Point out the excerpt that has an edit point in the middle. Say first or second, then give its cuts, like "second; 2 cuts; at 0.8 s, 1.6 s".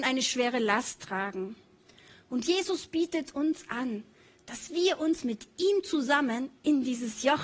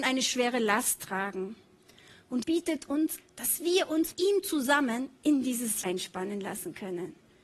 second; 4 cuts; at 2.4 s, 3.2 s, 4.1 s, 5.8 s